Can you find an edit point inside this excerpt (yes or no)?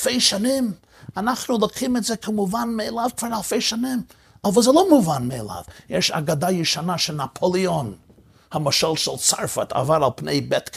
no